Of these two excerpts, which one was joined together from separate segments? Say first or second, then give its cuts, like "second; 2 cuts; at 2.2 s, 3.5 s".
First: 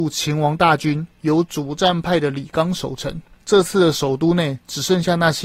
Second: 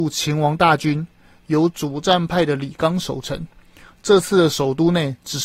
first; 2 cuts; at 1.2 s, 3.4 s